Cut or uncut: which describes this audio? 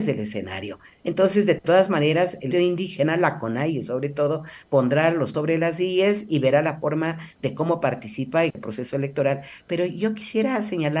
cut